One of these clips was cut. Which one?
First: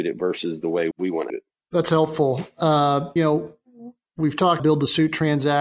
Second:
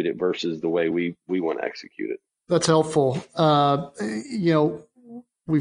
first; 4 cuts; at 0.9 s, 1.3 s, 3.2 s, 4.6 s

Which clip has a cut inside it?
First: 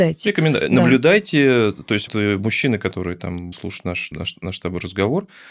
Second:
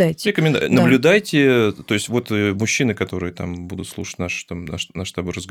first; 3 cuts; at 2.1 s, 3.5 s, 4.1 s

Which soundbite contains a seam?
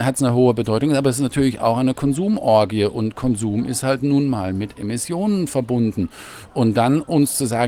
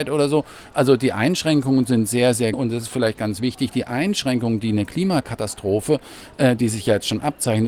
second; 1 cut; at 2.5 s

